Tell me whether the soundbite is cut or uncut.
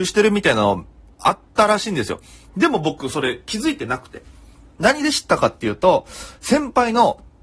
uncut